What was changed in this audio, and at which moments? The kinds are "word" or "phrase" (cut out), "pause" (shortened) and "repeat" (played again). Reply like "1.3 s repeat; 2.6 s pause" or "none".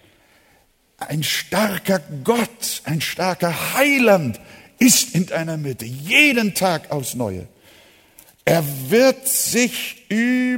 none